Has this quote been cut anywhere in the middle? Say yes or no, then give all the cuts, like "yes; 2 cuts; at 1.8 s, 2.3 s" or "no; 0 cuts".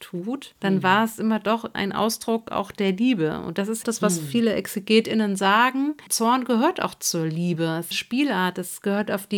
yes; 3 cuts; at 1.7 s, 3.8 s, 7.9 s